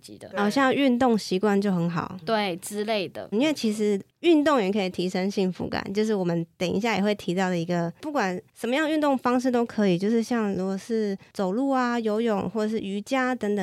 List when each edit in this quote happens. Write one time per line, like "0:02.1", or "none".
0:02.2
0:03.3